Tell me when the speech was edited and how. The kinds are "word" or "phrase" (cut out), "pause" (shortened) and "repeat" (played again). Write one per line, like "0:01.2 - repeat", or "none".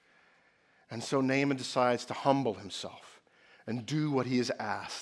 none